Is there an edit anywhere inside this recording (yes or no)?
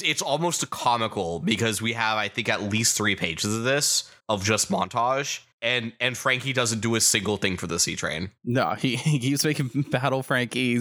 yes